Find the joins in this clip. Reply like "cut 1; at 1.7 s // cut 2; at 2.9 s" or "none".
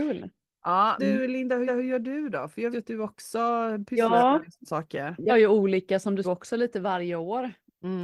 cut 1; at 1.0 s // cut 2; at 1.7 s // cut 3; at 2.7 s // cut 4; at 4.6 s // cut 5; at 5.3 s // cut 6; at 6.2 s